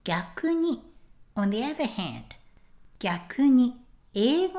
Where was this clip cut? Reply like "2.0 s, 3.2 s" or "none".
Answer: none